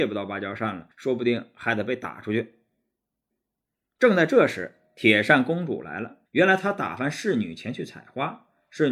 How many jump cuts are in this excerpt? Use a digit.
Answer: 2